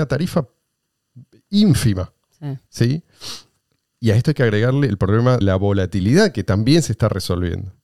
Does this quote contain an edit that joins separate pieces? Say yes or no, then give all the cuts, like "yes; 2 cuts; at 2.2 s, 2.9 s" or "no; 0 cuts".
yes; 2 cuts; at 2.7 s, 5.4 s